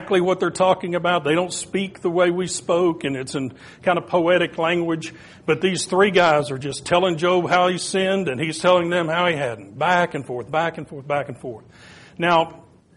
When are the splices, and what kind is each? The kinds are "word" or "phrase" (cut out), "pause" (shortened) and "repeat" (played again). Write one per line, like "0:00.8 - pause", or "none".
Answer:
none